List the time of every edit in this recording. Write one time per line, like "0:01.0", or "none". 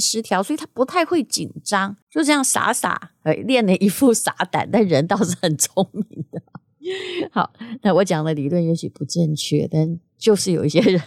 0:02.0